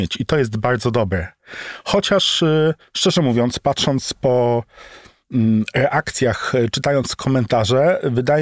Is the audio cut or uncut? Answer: uncut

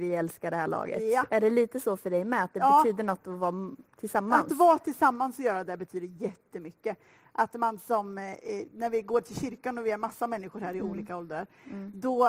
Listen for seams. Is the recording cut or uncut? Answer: uncut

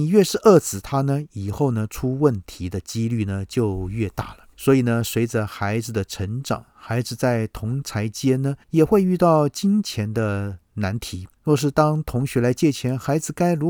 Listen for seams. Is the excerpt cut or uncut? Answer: cut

